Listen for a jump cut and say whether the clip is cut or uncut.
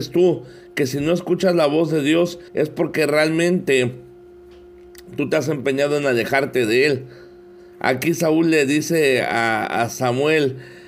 cut